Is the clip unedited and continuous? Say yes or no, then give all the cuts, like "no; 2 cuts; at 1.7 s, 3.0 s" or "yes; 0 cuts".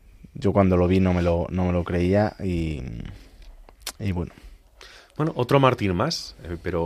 yes; 0 cuts